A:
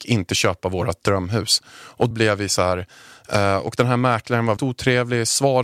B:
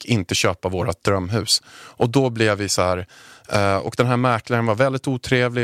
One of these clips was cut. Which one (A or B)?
A